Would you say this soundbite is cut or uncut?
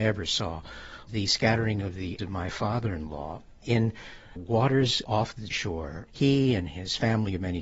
cut